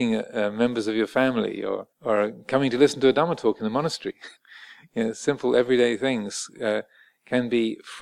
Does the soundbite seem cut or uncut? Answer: cut